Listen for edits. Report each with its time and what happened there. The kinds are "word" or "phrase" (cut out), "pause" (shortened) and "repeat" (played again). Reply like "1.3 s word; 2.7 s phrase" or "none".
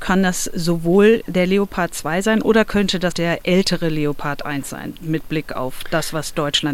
3.1 s word